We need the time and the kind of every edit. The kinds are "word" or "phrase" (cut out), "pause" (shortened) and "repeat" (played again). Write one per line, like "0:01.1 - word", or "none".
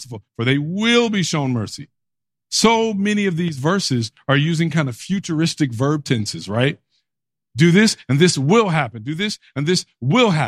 none